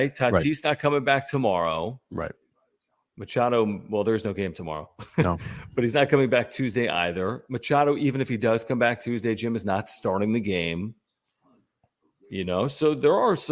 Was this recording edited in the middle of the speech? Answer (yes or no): no